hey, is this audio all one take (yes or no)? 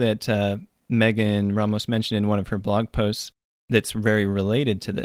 yes